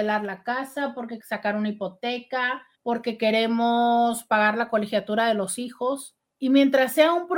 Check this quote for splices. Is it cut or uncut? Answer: cut